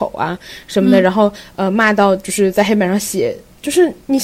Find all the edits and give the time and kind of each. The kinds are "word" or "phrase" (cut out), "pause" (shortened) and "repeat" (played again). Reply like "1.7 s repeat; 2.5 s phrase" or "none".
none